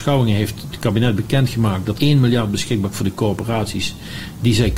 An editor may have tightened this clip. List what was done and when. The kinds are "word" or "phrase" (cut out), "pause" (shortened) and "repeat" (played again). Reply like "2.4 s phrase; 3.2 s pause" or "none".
2.0 s word; 2.9 s word